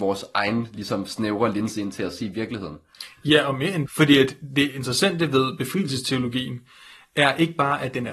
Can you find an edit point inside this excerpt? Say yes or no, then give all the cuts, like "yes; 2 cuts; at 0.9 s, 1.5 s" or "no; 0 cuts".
yes; 1 cut; at 3.9 s